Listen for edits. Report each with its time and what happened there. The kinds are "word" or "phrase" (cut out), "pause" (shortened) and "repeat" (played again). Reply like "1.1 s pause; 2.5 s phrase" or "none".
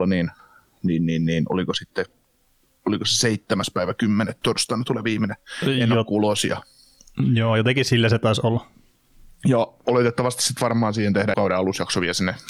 4.4 s word; 11.3 s word